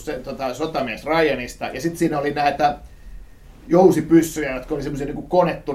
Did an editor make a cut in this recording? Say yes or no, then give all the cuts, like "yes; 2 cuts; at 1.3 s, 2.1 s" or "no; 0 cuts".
no; 0 cuts